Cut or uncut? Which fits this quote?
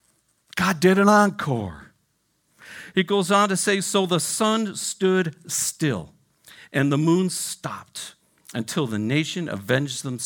uncut